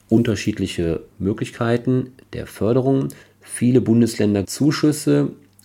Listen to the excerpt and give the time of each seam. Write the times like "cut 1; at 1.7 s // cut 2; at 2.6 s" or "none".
cut 1; at 1.1 s // cut 2; at 3.2 s // cut 3; at 4.4 s